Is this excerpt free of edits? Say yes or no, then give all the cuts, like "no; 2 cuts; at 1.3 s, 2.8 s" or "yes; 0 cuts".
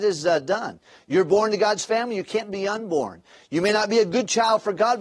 yes; 0 cuts